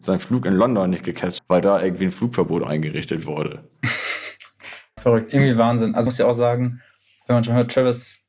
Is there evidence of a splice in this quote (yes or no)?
yes